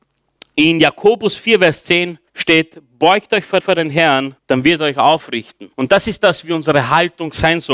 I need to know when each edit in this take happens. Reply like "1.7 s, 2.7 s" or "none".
2.3 s, 3.6 s, 4.4 s, 5.7 s